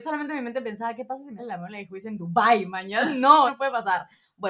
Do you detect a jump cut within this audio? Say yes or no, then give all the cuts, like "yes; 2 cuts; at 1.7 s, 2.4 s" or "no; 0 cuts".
yes; 2 cuts; at 1.4 s, 3.5 s